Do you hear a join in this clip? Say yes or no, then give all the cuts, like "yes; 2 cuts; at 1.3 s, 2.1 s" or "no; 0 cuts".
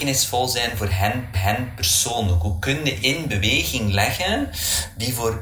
yes; 2 cuts; at 1.3 s, 3.0 s